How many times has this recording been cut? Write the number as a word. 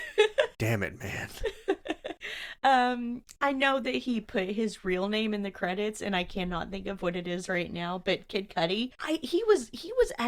one